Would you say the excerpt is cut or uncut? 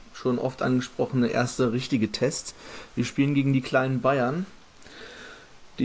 uncut